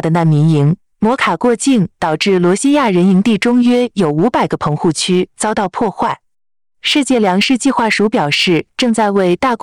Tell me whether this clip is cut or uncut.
uncut